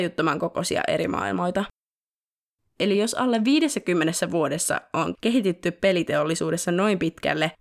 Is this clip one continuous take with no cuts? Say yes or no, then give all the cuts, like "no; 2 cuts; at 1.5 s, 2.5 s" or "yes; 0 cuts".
yes; 0 cuts